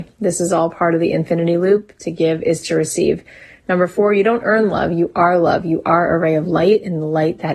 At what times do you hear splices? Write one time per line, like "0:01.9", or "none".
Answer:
none